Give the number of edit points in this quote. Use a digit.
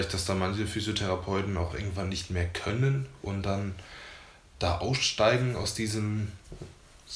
1